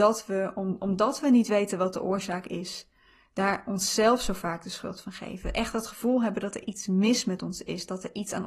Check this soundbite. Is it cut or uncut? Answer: uncut